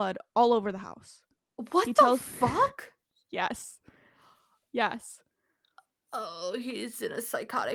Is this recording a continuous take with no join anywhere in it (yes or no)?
yes